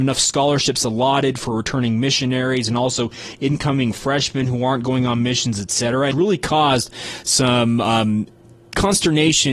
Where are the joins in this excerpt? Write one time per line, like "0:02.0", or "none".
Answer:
0:06.1